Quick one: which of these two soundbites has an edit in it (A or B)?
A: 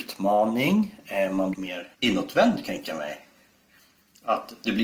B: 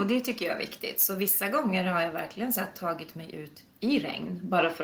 A